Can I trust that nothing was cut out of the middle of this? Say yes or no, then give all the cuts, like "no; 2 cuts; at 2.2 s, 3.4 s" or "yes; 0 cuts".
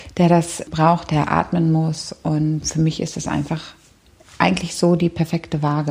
yes; 0 cuts